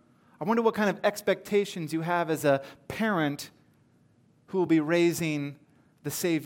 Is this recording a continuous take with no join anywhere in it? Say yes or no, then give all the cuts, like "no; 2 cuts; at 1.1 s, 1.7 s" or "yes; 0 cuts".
yes; 0 cuts